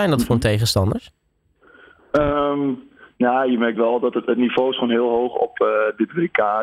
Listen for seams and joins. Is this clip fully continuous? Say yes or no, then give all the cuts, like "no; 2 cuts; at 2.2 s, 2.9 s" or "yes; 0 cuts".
yes; 0 cuts